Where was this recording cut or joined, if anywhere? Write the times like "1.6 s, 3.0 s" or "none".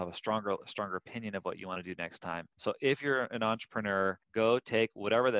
2.5 s, 4.2 s